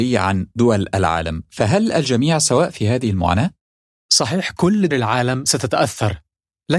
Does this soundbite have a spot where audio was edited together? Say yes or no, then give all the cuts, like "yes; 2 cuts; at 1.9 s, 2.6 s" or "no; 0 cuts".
yes; 1 cut; at 4.9 s